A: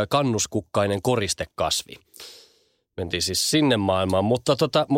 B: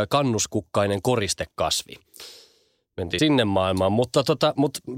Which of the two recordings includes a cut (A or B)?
B